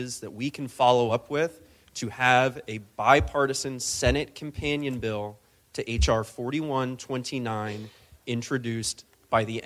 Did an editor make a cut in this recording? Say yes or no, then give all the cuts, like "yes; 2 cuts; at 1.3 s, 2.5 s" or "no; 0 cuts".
no; 0 cuts